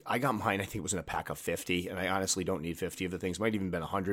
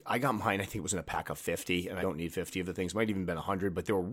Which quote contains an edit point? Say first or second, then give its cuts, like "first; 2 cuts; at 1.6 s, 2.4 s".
second; 1 cut; at 2.0 s